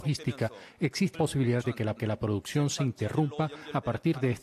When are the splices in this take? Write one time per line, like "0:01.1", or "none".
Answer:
0:01.1
0:01.6
0:02.0